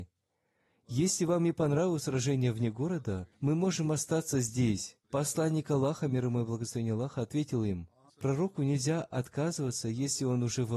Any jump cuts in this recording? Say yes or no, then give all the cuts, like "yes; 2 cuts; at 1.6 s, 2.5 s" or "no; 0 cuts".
yes; 3 cuts; at 3.3 s, 5.0 s, 8.1 s